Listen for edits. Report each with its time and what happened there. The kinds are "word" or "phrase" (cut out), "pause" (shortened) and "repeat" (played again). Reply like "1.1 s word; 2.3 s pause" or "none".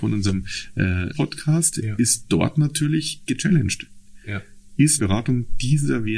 1.1 s word; 3.3 s word; 5.0 s word